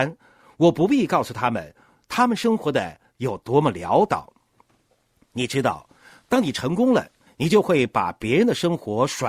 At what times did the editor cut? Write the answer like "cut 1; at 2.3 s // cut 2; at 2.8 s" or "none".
cut 1; at 7.3 s